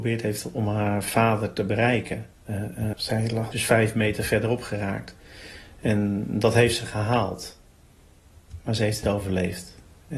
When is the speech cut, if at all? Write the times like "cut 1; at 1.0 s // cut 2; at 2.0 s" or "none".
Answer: cut 1; at 2.3 s // cut 2; at 2.9 s // cut 3; at 3.5 s // cut 4; at 9.0 s